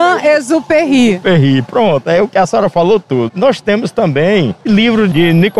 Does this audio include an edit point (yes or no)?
no